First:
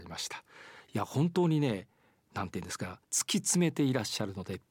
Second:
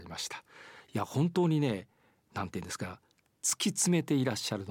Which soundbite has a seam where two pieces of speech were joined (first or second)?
first